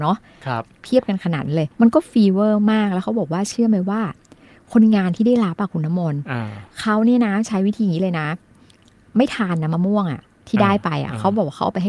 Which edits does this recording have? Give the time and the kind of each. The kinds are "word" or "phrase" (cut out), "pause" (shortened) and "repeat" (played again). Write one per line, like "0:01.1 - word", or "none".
0:01.7 - pause